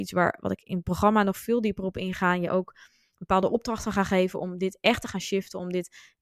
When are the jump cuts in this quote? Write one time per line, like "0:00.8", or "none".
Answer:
none